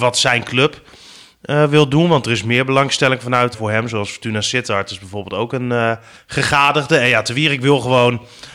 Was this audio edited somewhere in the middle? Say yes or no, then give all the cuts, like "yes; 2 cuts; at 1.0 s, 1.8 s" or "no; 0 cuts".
yes; 2 cuts; at 3.5 s, 6.2 s